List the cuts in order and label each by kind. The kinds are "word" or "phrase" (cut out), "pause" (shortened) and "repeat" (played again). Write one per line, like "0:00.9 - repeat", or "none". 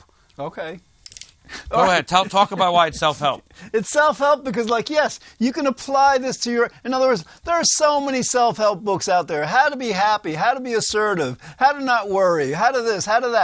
none